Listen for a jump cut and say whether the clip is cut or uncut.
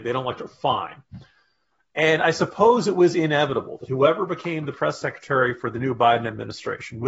uncut